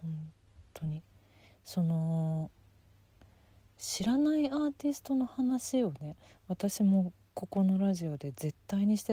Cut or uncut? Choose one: uncut